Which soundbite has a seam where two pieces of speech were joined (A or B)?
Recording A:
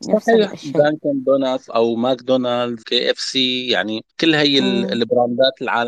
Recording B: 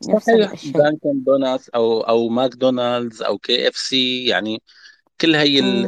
A